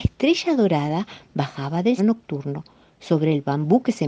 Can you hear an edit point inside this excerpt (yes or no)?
yes